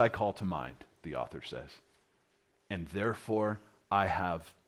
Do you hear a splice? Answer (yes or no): no